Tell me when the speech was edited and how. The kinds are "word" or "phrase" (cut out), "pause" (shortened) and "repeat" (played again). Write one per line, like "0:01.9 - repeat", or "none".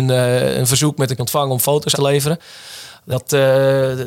0:01.2 - word
0:01.9 - word
0:03.1 - word